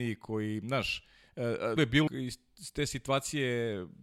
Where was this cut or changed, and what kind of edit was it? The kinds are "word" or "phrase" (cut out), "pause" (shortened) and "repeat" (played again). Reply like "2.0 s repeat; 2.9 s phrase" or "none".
1.8 s word; 2.1 s phrase